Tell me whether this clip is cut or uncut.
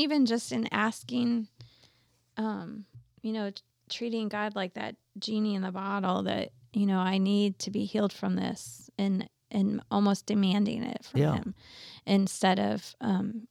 uncut